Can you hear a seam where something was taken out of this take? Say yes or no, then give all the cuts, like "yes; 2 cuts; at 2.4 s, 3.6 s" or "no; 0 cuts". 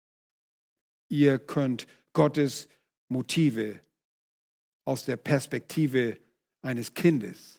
no; 0 cuts